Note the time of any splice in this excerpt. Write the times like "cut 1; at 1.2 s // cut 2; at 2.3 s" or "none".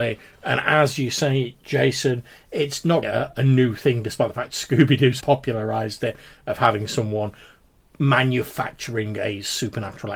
cut 1; at 3.0 s // cut 2; at 5.2 s